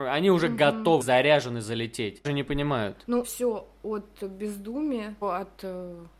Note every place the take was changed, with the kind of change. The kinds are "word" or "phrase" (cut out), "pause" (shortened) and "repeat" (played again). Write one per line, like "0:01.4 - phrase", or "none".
0:01.0 - word
0:02.2 - word
0:03.2 - word
0:05.2 - word